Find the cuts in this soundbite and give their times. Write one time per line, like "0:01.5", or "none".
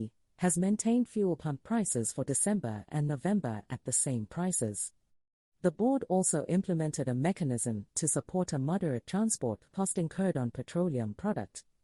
none